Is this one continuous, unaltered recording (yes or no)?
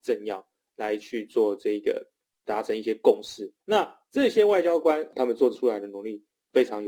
no